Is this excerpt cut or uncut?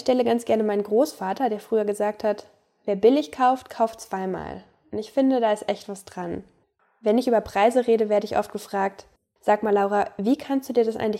uncut